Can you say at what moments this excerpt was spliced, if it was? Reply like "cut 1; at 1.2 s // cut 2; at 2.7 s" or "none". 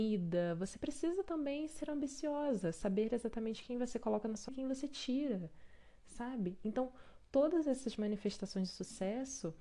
cut 1; at 4.5 s